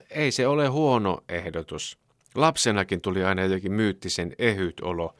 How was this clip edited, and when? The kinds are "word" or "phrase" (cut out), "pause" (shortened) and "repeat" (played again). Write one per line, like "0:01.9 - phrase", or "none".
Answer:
none

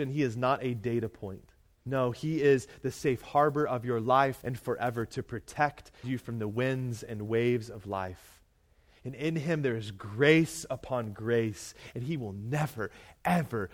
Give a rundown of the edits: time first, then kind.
0:01.6 - pause
0:04.4 - word
0:06.0 - phrase

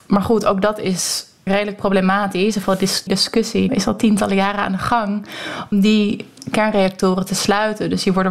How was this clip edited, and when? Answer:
0:01.5 - word
0:02.6 - word
0:03.1 - word
0:03.7 - word
0:05.7 - word

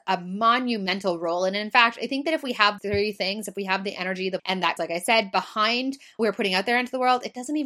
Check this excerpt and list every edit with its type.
0:02.8 - word
0:04.4 - word
0:04.8 - word
0:06.2 - word

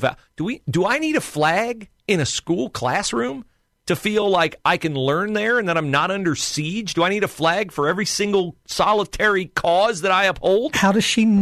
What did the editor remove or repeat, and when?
none

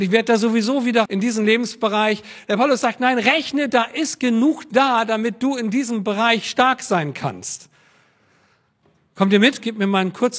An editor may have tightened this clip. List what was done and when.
0:01.1 - word
0:03.7 - word

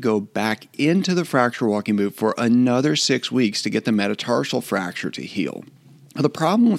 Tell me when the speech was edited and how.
none

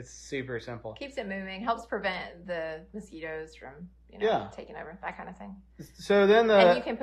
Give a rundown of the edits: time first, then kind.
none

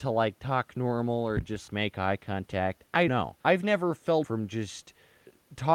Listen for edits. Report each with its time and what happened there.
0:01.7 - word
0:03.1 - word
0:03.4 - pause
0:04.2 - word

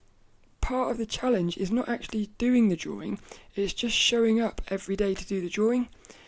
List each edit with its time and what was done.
0:02.3 - pause

